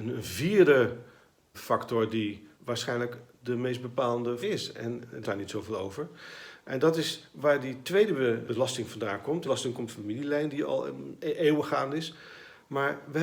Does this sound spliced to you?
yes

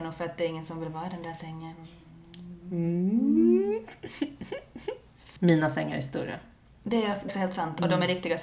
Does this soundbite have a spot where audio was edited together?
yes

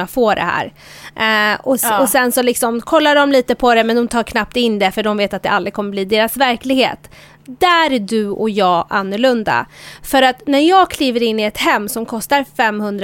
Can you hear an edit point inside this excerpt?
no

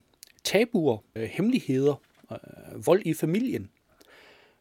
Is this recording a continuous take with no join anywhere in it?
no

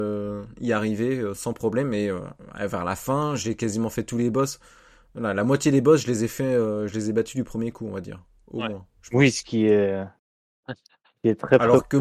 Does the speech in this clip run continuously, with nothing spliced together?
yes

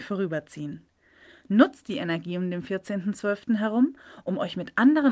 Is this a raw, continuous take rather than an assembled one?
yes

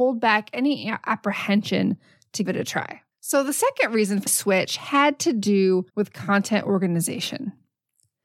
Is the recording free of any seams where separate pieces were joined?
no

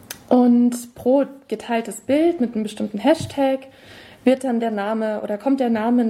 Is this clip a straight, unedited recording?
yes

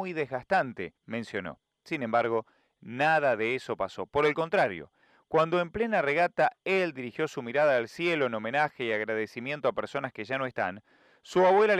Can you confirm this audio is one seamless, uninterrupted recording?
no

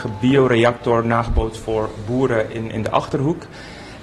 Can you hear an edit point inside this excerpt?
no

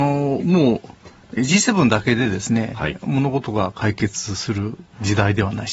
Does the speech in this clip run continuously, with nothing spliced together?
no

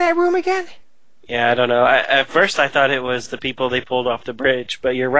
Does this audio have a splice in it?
no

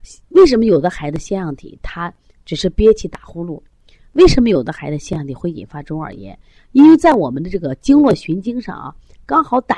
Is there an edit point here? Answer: no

